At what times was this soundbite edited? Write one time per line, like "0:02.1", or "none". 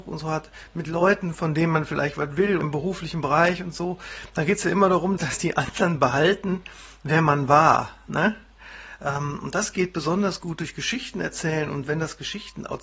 0:02.6
0:05.2